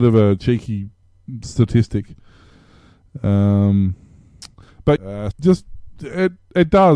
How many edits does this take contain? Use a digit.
3